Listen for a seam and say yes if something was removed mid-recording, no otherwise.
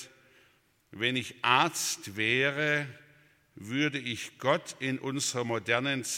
no